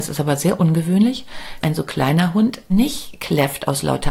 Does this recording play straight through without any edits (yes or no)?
no